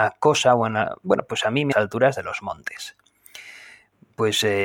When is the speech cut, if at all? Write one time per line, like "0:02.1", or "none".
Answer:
0:01.7